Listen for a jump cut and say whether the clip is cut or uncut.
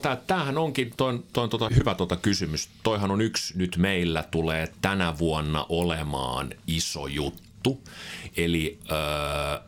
cut